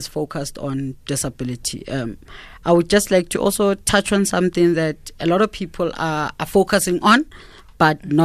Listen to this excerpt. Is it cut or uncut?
uncut